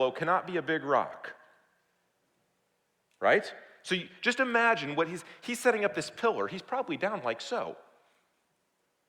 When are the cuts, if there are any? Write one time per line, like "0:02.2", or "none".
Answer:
none